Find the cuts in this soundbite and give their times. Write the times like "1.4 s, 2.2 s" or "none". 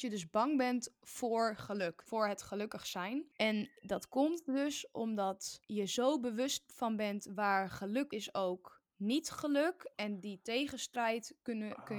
2.1 s, 8.1 s, 8.9 s